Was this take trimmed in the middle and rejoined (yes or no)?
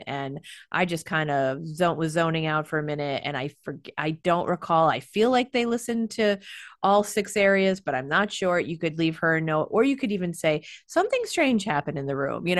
no